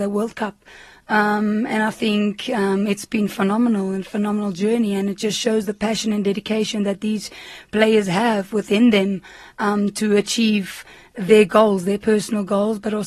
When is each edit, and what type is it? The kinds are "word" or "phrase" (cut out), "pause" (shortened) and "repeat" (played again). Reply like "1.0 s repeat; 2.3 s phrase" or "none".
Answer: none